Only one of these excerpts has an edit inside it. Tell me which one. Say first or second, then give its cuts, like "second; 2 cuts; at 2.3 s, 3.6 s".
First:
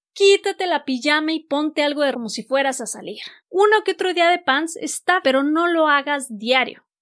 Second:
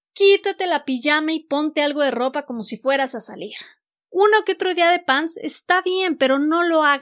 first; 3 cuts; at 2.1 s, 3.4 s, 5.2 s